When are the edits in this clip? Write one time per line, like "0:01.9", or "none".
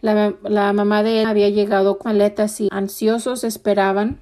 0:01.2
0:02.0
0:02.7